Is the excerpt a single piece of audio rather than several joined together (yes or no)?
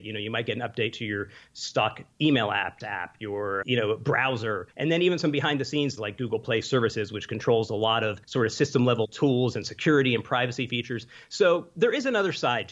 no